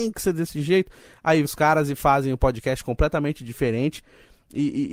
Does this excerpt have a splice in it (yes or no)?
yes